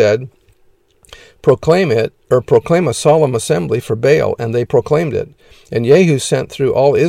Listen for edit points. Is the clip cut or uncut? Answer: uncut